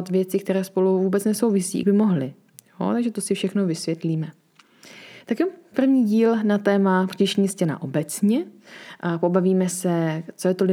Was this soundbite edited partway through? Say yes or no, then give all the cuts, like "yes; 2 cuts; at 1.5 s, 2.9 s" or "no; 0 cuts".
yes; 2 cuts; at 1.8 s, 5.7 s